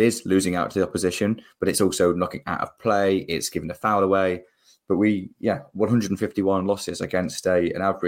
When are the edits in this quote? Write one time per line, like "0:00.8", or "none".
none